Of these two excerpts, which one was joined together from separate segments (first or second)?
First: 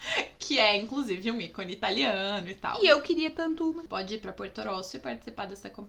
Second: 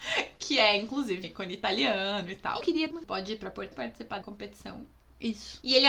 second